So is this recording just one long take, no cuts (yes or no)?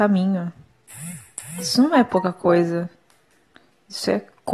yes